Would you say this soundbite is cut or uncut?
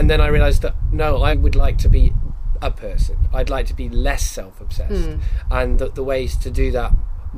cut